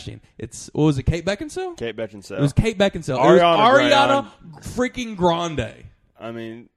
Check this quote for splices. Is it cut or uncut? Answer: uncut